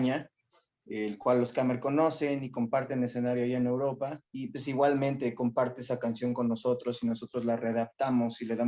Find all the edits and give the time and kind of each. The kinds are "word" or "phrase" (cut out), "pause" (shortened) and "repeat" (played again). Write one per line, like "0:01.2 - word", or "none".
0:04.2 - pause